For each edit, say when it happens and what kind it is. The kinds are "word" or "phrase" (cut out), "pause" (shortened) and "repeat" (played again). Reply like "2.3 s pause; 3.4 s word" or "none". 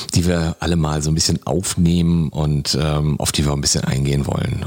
none